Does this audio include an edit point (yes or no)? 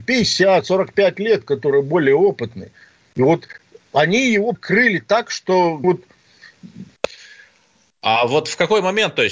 yes